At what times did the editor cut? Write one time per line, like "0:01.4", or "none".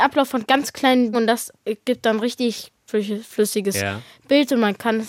0:01.1
0:02.9